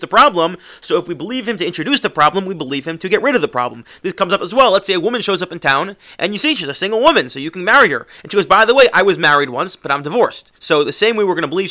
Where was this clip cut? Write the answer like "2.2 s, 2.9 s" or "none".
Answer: 10.6 s